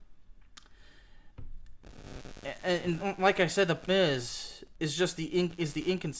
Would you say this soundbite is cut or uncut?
cut